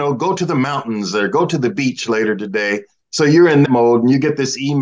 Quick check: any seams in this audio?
yes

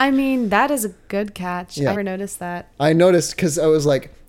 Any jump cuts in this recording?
yes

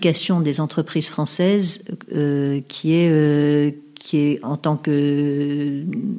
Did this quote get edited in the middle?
no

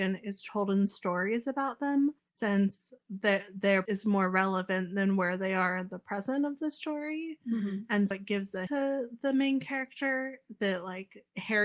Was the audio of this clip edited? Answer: yes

